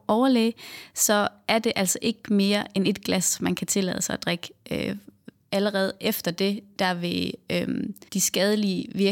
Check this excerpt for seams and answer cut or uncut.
cut